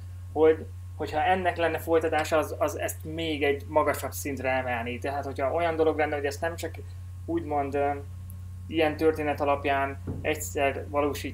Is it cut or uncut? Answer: uncut